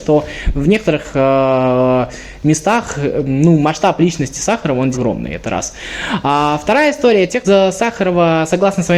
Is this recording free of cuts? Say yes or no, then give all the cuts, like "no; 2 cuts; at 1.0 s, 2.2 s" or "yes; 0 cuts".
no; 2 cuts; at 4.9 s, 7.4 s